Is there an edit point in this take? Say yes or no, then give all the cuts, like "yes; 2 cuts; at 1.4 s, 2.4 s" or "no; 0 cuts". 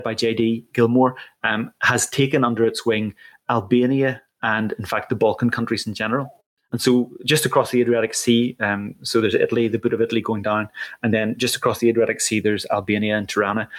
no; 0 cuts